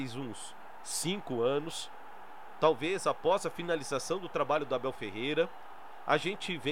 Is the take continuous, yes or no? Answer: yes